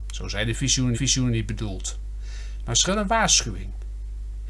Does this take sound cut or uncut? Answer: cut